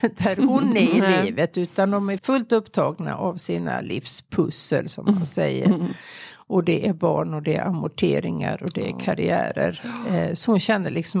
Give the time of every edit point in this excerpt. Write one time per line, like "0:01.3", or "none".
0:02.2